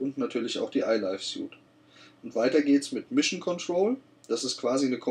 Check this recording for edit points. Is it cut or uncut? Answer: uncut